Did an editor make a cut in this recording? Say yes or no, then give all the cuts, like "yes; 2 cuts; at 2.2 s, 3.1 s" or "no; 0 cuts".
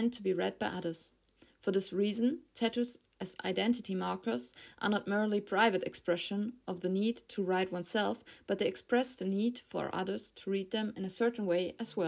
no; 0 cuts